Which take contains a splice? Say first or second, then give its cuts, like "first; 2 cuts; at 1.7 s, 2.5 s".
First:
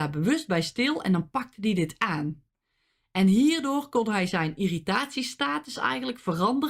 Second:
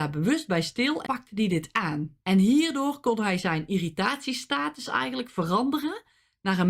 second; 2 cuts; at 1.0 s, 2.2 s